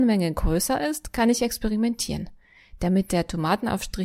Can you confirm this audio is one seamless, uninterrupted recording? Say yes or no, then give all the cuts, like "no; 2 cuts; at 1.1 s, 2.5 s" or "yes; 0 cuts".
yes; 0 cuts